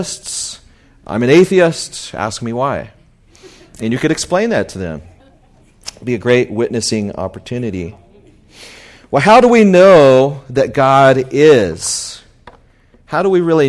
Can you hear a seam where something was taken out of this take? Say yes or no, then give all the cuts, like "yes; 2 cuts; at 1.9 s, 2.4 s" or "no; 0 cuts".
no; 0 cuts